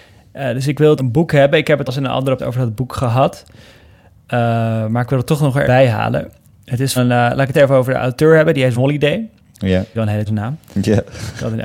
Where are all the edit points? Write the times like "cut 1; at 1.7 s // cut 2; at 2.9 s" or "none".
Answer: cut 1; at 1.0 s // cut 2; at 1.9 s // cut 3; at 2.4 s // cut 4; at 5.6 s // cut 5; at 7.0 s // cut 6; at 7.5 s // cut 7; at 8.8 s // cut 8; at 9.9 s // cut 9; at 10.3 s

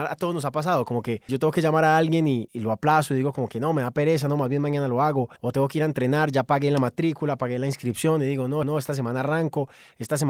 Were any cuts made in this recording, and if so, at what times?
cut 1; at 1.3 s // cut 2; at 2.5 s // cut 3; at 5.4 s // cut 4; at 8.6 s

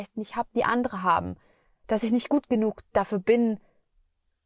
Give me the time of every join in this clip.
none

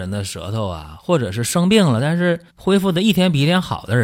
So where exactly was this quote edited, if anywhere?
cut 1; at 2.5 s

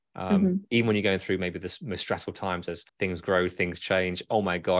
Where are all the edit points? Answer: cut 1; at 2.9 s

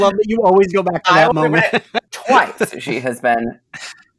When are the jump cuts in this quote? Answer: none

